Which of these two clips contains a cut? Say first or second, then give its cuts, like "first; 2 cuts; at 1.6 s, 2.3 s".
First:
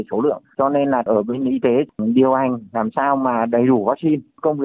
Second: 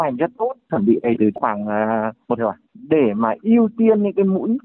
second; 2 cuts; at 1.2 s, 2.4 s